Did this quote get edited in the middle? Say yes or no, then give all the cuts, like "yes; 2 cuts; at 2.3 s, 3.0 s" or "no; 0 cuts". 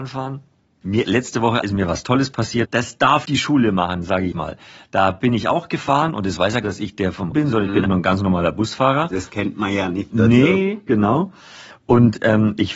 yes; 7 cuts; at 1.0 s, 3.2 s, 4.3 s, 6.6 s, 7.3 s, 7.9 s, 9.3 s